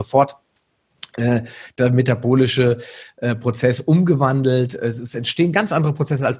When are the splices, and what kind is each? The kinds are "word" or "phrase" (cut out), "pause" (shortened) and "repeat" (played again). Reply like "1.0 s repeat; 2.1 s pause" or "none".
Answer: none